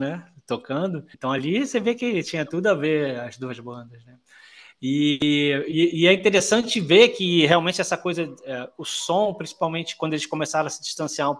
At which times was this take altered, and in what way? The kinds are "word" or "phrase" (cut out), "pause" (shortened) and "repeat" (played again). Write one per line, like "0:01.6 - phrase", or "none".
0:01.1 - pause